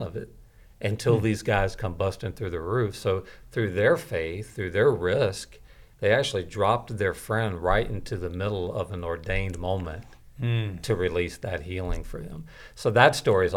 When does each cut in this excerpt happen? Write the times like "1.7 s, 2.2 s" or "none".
none